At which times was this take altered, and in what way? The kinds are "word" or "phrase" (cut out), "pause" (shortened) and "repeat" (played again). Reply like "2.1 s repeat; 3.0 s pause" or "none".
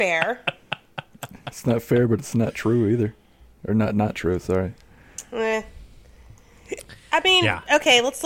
none